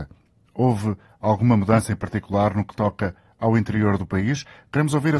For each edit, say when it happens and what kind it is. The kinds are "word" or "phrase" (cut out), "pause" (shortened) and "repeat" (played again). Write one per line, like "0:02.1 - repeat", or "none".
none